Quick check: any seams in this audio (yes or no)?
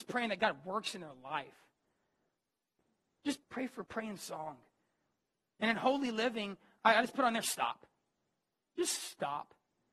yes